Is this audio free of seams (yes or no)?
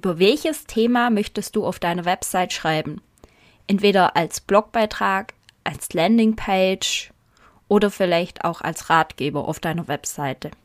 yes